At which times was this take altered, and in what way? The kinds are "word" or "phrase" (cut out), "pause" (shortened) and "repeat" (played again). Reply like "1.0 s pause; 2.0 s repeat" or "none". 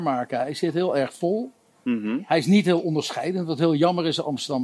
none